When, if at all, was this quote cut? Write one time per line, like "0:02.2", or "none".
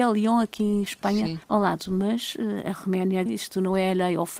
0:01.4
0:03.3